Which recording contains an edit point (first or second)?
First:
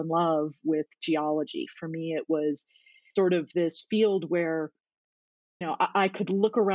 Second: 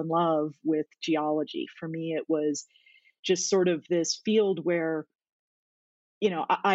first